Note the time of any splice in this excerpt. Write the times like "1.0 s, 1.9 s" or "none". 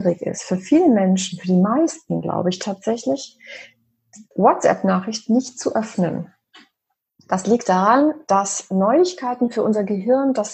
4.3 s

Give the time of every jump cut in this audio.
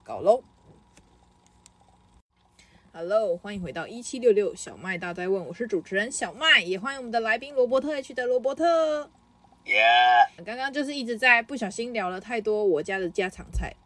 10.4 s

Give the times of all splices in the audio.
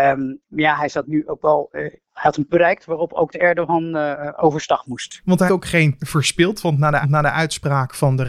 1.0 s, 2.0 s, 2.5 s, 3.3 s, 5.5 s, 6.0 s, 7.0 s

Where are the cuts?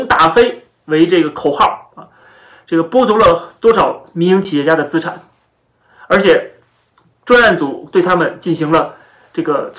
none

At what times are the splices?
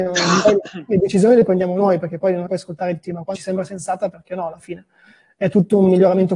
2.5 s, 3.0 s, 3.3 s

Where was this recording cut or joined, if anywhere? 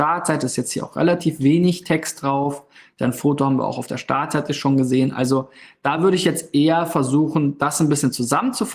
none

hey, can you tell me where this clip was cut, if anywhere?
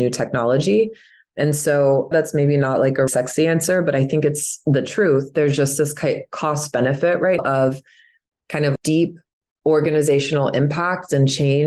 2.1 s, 3.1 s, 7.4 s, 8.8 s

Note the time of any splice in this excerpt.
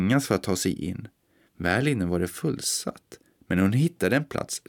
none

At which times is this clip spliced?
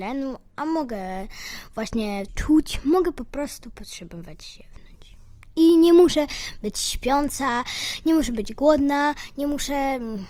2.3 s

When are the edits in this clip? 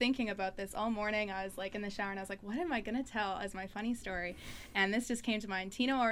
none

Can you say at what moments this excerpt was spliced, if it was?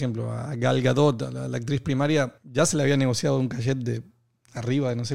2.4 s

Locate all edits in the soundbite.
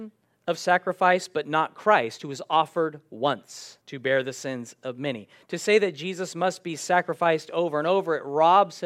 3.8 s

